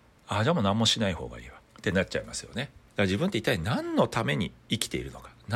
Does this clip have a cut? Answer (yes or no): yes